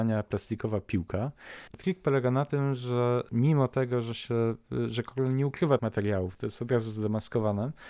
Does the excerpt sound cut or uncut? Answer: cut